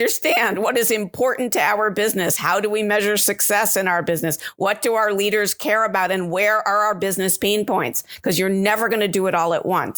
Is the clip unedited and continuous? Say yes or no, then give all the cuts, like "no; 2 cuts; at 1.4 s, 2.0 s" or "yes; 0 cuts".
yes; 0 cuts